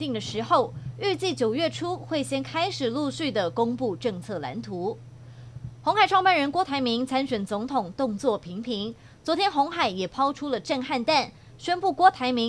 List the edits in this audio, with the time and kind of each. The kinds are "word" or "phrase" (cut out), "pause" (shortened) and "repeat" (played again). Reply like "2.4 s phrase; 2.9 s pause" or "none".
none